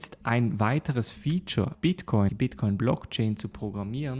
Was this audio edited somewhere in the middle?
yes; 2 cuts; at 1.7 s, 2.3 s

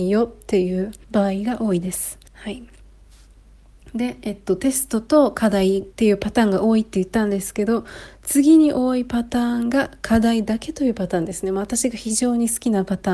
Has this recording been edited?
yes; 3 cuts; at 1.0 s, 2.3 s, 5.9 s

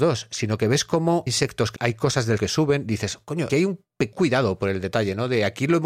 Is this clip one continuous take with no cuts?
no; 5 cuts; at 1.3 s, 1.8 s, 2.4 s, 3.5 s, 4.1 s

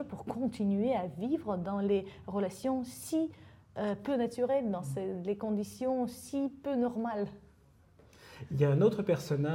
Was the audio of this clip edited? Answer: no; 0 cuts

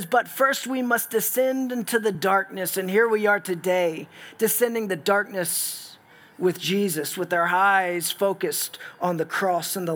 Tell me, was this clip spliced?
no; 0 cuts

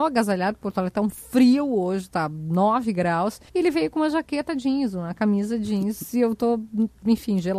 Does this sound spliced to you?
yes; 1 cut; at 3.5 s

